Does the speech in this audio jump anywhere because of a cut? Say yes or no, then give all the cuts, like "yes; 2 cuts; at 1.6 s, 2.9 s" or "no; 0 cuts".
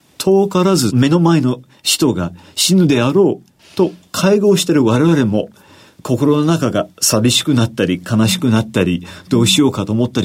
no; 0 cuts